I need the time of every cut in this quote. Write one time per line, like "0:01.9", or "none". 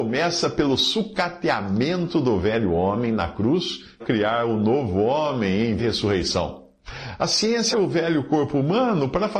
0:04.0
0:05.8
0:07.7